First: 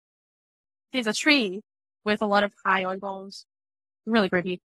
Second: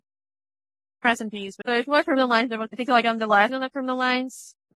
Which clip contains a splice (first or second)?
second